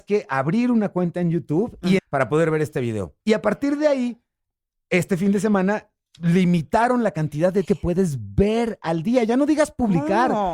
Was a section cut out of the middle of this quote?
yes; 3 cuts; at 2.0 s, 3.2 s, 7.6 s

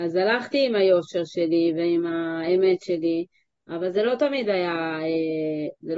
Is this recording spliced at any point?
no; 0 cuts

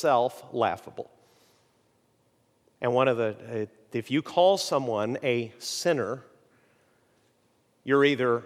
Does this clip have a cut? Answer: no; 0 cuts

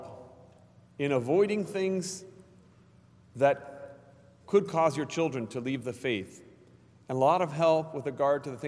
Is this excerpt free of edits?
yes; 0 cuts

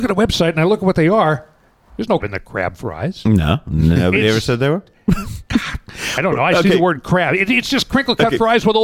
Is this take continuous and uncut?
no; 1 cut; at 2.2 s

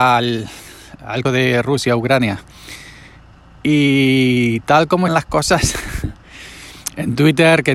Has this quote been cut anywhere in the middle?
yes; 2 cuts; at 1.2 s, 5.1 s

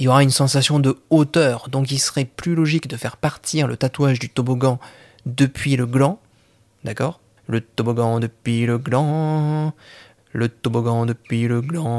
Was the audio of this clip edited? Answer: no; 0 cuts

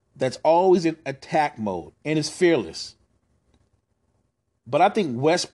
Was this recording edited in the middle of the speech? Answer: no; 0 cuts

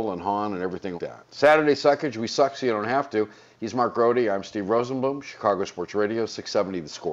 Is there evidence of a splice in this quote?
yes; 1 cut; at 1.0 s

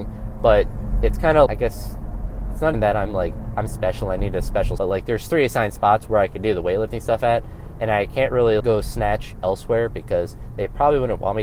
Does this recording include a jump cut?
yes; 4 cuts; at 1.5 s, 2.7 s, 4.8 s, 8.6 s

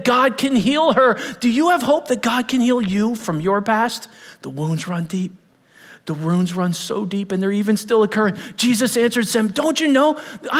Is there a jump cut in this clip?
no; 0 cuts

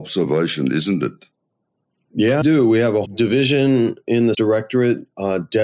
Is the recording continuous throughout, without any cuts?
no; 3 cuts; at 2.4 s, 3.1 s, 4.3 s

